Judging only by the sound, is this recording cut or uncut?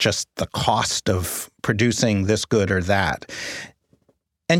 uncut